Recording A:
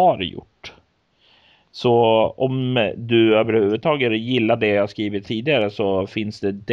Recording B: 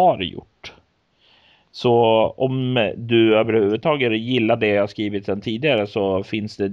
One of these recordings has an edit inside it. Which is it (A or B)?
A